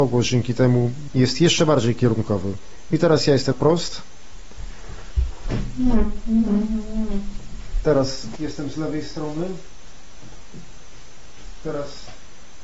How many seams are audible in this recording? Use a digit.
3